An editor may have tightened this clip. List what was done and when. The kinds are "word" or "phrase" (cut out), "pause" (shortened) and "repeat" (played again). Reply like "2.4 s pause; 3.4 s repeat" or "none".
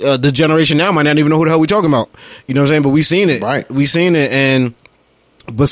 none